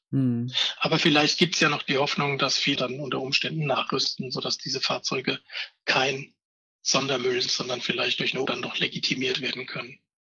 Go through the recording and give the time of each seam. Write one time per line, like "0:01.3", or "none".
0:02.8
0:07.5
0:08.5